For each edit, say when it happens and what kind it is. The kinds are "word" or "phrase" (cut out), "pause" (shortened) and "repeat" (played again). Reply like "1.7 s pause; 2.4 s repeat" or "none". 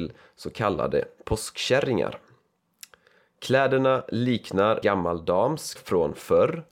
4.8 s word; 5.8 s word